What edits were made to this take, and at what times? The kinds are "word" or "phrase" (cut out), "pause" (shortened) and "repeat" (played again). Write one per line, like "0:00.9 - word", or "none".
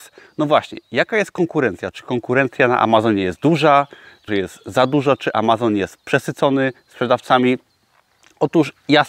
0:04.3 - word